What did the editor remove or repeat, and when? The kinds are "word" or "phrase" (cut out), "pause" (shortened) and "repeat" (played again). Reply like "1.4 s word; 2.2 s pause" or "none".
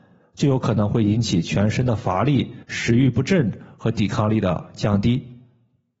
2.6 s pause